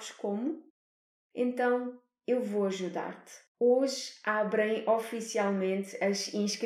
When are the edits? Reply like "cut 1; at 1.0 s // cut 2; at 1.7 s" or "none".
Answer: cut 1; at 3.5 s